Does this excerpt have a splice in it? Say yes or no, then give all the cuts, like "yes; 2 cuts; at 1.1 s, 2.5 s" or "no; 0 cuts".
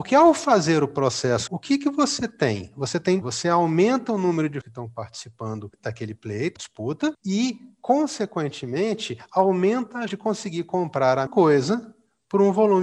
yes; 6 cuts; at 1.5 s, 3.2 s, 4.6 s, 6.6 s, 10.1 s, 11.3 s